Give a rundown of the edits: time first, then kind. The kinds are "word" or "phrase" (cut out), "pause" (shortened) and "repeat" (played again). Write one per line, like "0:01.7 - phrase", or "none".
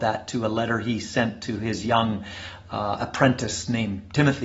none